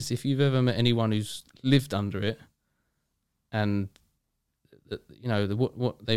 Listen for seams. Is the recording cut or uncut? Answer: uncut